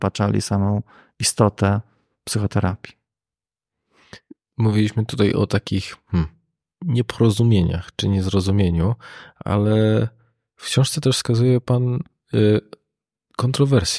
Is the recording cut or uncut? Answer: uncut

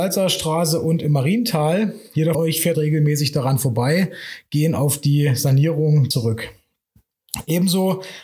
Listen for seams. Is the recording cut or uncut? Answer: cut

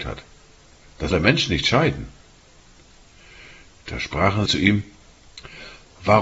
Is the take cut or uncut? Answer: cut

